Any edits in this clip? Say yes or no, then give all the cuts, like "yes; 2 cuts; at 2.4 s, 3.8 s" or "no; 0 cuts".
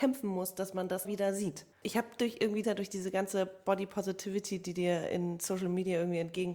yes; 3 cuts; at 1.0 s, 1.7 s, 2.6 s